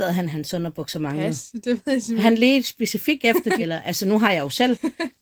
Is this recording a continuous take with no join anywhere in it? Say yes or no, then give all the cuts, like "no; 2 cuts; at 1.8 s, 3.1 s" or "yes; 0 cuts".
no; 1 cut; at 3.6 s